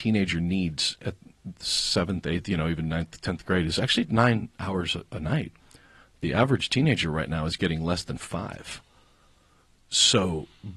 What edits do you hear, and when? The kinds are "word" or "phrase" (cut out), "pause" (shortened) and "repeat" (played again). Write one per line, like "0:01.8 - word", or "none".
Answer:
none